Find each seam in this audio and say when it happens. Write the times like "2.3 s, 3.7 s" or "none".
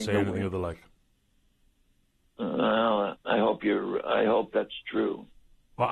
3.2 s